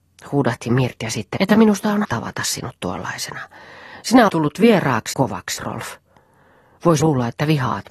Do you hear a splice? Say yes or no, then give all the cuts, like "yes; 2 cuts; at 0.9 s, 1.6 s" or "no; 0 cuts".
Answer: yes; 6 cuts; at 1.4 s, 2.0 s, 4.3 s, 5.1 s, 5.6 s, 7.0 s